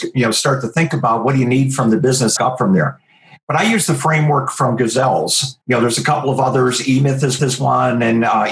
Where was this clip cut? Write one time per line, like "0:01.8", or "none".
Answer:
0:02.4
0:05.6
0:07.4